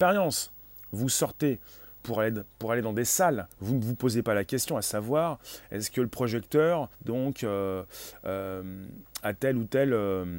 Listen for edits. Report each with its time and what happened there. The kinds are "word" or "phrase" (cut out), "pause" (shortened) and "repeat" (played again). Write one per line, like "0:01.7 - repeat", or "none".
0:03.5 - pause
0:06.9 - pause